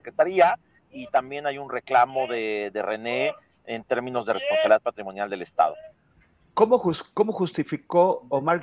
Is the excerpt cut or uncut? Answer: uncut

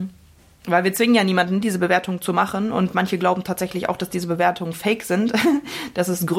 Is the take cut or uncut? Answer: uncut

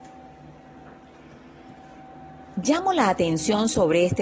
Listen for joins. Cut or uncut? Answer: uncut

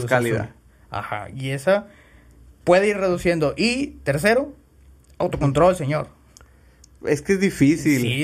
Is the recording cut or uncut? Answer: uncut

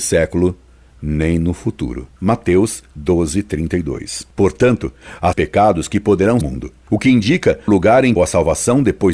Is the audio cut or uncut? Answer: cut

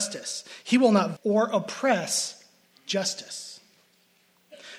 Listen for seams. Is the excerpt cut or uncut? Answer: cut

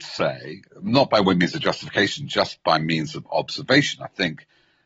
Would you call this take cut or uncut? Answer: uncut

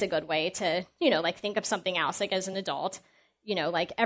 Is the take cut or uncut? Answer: uncut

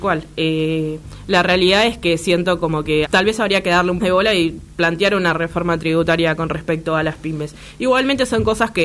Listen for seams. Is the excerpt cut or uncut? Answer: cut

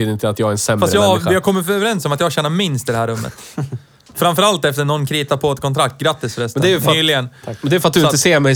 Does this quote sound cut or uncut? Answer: uncut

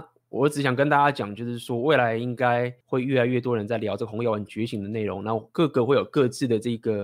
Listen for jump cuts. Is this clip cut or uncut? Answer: cut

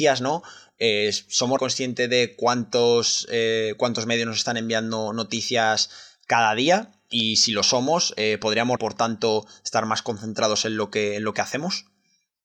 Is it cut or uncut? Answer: cut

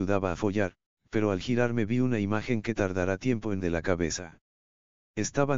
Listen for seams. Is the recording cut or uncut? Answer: cut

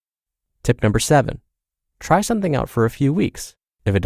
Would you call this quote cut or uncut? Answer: uncut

